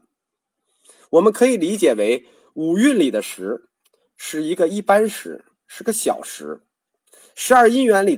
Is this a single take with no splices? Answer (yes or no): yes